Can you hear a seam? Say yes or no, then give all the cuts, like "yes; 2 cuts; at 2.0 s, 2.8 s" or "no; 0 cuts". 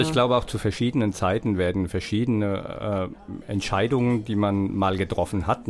no; 0 cuts